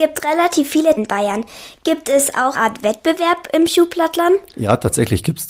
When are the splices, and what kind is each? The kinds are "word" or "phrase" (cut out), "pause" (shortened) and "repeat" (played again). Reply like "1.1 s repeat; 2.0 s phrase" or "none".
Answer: 1.0 s word; 2.5 s phrase